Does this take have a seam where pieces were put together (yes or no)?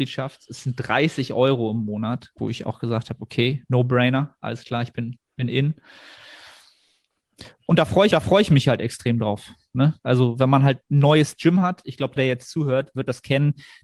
yes